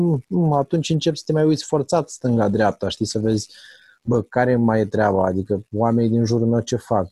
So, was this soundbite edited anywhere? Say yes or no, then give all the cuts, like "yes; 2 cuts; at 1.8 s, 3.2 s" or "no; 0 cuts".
no; 0 cuts